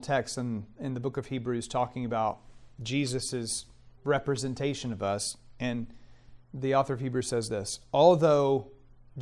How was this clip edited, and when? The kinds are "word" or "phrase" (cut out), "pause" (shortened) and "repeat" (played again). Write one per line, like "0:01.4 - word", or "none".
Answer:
0:04.0 - pause
0:06.4 - pause